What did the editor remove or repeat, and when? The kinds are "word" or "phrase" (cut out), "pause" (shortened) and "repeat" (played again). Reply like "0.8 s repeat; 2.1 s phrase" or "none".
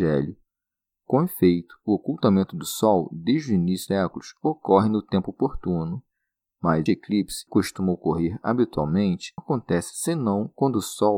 3.9 s word; 6.9 s word; 7.5 s word; 9.4 s word